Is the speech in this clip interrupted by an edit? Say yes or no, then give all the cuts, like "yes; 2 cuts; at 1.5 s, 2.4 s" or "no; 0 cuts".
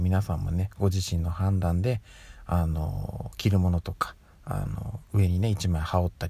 no; 0 cuts